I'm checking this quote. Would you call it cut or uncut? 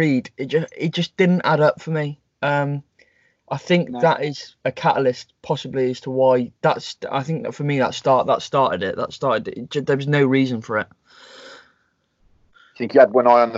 cut